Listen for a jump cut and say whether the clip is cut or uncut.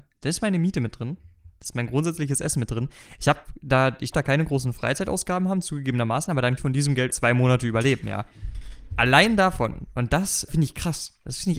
cut